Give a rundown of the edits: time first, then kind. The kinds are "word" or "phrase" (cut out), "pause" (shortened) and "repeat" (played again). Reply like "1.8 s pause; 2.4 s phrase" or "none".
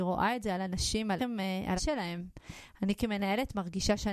1.2 s word; 1.8 s word